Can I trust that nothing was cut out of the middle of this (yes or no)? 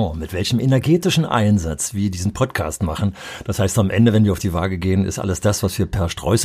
yes